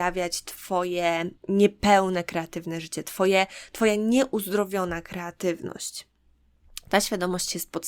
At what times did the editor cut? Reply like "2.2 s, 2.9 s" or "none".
1.4 s